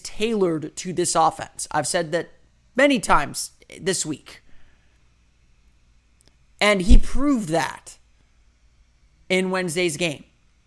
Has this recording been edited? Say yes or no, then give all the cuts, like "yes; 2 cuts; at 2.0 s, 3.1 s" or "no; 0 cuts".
no; 0 cuts